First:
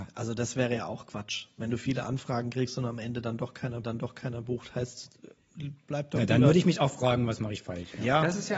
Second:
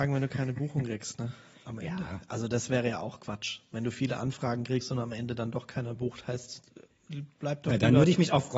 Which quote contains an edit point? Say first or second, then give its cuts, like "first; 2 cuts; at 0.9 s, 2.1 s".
first; 1 cut; at 3.8 s